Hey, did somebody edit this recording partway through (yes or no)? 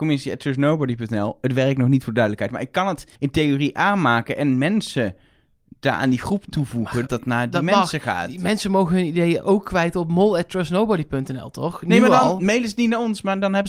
yes